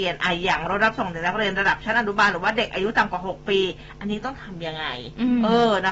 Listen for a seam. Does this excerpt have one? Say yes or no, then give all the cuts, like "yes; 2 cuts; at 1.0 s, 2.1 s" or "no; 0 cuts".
no; 0 cuts